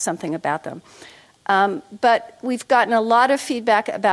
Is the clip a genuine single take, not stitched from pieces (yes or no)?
yes